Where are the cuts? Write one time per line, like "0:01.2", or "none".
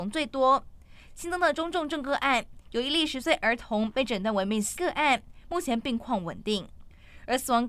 0:04.7